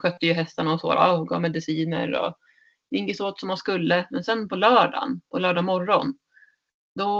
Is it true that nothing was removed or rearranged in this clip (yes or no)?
yes